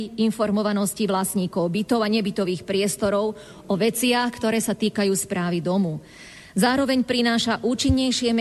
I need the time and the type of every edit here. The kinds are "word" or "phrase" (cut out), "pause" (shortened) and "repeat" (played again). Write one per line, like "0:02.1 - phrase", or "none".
none